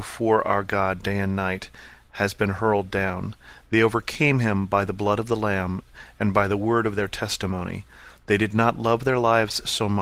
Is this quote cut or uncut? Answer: uncut